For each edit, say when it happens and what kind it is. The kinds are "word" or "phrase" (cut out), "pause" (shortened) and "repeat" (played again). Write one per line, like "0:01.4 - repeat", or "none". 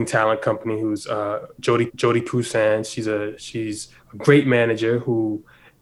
0:01.9 - repeat

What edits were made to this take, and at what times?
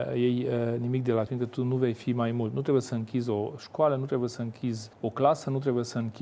0:01.3 - word
0:04.9 - pause

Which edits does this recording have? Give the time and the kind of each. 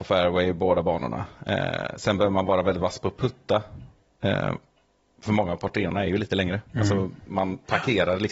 none

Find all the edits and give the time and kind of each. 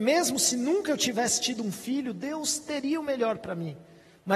none

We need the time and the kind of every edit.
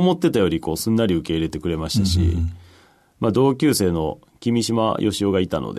none

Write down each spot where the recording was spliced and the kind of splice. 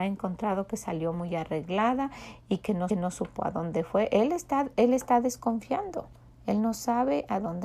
0:02.9 - repeat

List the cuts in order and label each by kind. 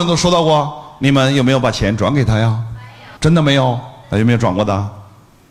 0:03.2 - pause

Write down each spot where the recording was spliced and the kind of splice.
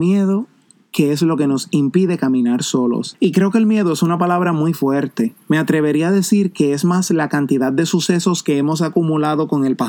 0:05.4 - pause

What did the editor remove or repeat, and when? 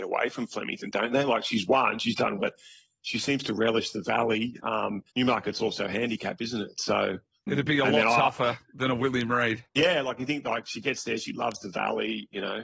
0:02.4 - word
0:05.1 - pause
0:07.5 - word
0:09.7 - pause

